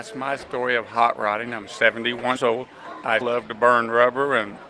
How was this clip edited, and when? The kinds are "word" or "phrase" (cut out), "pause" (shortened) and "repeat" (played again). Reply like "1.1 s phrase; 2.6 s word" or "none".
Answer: 2.4 s word; 3.2 s word